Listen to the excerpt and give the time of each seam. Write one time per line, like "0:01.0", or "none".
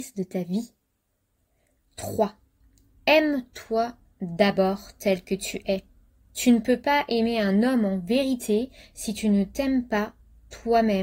none